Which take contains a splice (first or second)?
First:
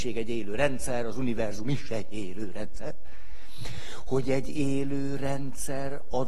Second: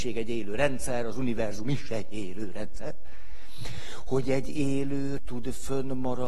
second